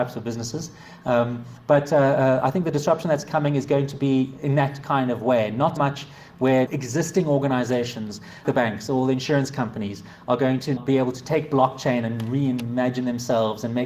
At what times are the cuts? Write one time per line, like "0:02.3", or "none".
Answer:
0:05.8
0:06.7
0:08.4
0:10.8